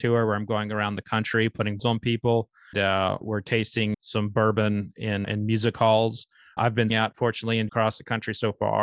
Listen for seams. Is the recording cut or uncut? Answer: cut